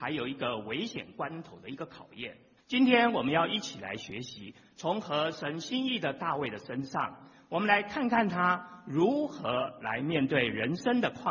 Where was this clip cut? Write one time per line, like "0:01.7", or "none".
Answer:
0:02.6